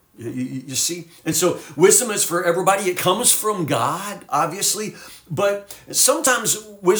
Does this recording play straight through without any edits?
yes; 0 cuts

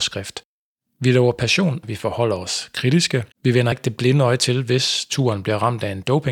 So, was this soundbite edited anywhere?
yes; 3 cuts; at 1.8 s, 3.3 s, 3.7 s

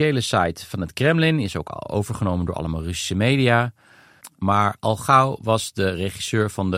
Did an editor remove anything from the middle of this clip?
no; 0 cuts

